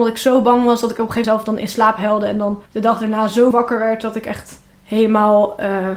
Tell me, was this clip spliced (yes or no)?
yes